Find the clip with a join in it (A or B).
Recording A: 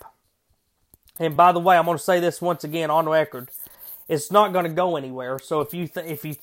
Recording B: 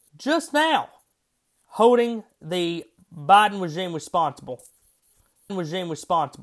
B